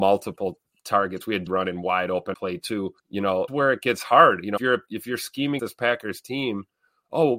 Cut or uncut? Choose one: cut